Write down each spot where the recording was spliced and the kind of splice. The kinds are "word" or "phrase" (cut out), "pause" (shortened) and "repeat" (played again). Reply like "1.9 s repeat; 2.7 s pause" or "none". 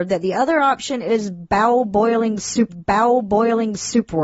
2.7 s repeat